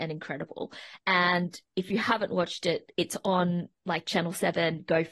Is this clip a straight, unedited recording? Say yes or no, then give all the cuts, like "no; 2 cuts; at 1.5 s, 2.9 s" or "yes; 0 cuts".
yes; 0 cuts